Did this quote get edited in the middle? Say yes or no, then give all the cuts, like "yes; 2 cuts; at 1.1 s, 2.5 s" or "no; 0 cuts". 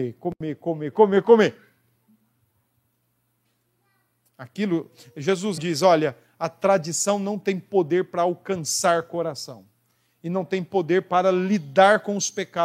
yes; 2 cuts; at 0.9 s, 5.6 s